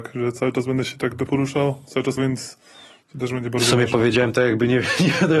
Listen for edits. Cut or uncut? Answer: cut